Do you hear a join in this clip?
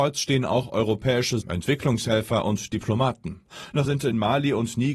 yes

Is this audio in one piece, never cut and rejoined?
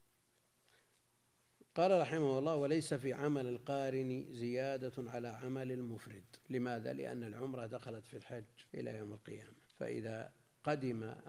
no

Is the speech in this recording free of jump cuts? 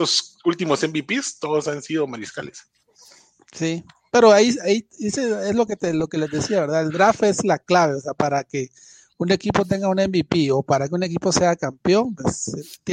yes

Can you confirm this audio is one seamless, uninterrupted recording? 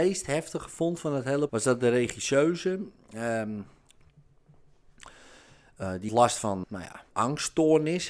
no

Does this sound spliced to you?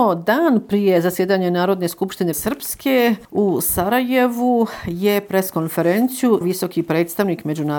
yes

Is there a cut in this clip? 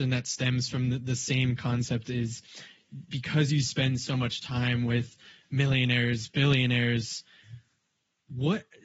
no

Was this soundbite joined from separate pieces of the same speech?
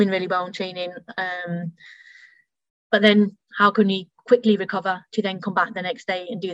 no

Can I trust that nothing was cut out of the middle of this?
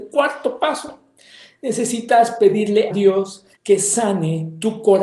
no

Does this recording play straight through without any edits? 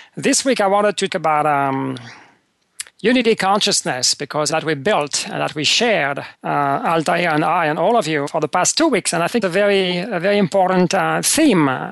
no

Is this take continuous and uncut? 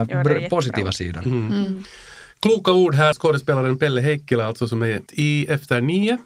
no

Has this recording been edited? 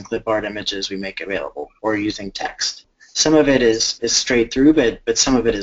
no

